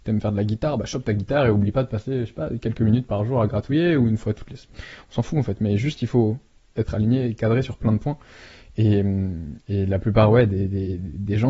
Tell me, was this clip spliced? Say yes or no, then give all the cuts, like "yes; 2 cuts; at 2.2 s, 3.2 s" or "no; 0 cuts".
no; 0 cuts